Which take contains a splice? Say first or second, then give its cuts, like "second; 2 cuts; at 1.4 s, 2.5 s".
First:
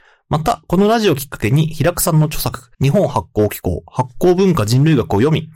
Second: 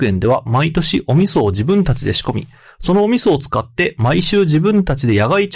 first; 1 cut; at 2.7 s